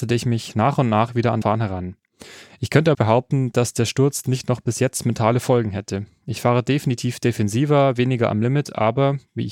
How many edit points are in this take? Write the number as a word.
two